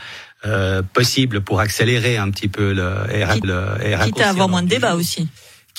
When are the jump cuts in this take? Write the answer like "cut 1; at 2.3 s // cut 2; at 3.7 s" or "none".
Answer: cut 1; at 3.4 s